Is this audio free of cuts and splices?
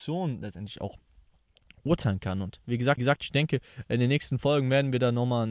no; 1 cut; at 3.0 s

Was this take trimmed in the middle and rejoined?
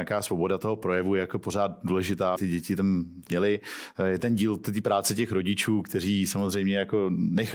yes; 3 cuts; at 2.4 s, 3.3 s, 4.2 s

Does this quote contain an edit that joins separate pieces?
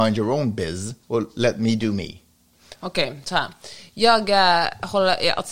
yes; 1 cut; at 1.0 s

